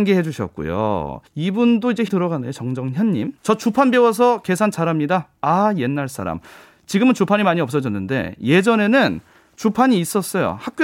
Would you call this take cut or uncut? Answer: cut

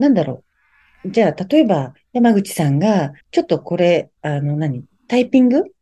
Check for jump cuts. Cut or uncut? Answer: cut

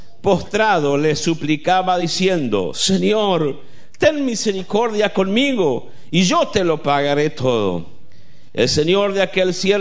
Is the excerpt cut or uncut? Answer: uncut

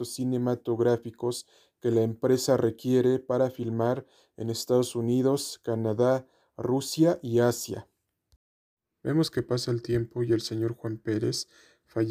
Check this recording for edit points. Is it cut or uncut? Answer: uncut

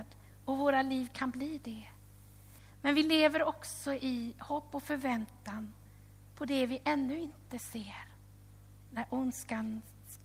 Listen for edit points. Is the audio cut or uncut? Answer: uncut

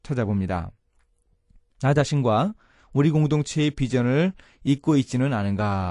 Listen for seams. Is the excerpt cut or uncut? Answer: uncut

